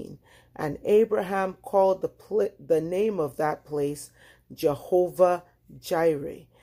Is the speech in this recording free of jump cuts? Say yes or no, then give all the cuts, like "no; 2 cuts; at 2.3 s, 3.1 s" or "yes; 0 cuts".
yes; 0 cuts